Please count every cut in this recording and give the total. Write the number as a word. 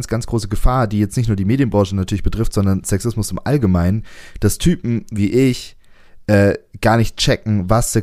zero